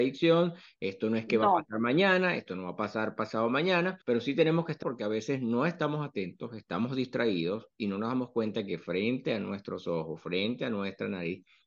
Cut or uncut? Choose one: cut